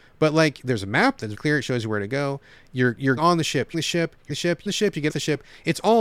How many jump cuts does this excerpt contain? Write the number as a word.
six